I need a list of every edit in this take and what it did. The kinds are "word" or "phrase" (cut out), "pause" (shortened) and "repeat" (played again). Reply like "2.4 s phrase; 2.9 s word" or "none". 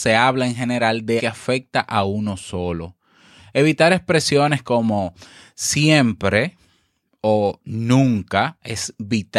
1.2 s word